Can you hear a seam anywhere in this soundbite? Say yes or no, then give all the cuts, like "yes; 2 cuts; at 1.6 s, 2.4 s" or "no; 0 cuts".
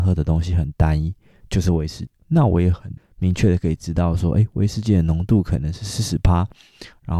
no; 0 cuts